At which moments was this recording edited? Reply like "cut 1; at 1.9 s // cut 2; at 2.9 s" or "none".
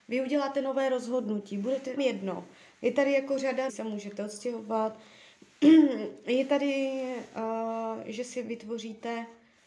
cut 1; at 2.0 s // cut 2; at 3.7 s